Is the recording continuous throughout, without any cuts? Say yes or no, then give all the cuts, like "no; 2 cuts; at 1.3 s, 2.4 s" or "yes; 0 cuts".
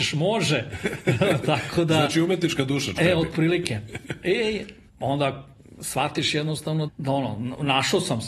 no; 3 cuts; at 3.0 s, 4.9 s, 6.9 s